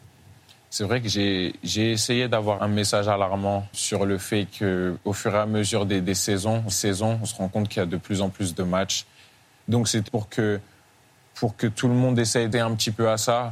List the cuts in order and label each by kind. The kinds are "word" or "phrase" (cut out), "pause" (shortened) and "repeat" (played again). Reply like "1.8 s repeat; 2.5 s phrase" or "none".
2.6 s word; 3.7 s word; 6.7 s repeat; 10.1 s word; 12.5 s phrase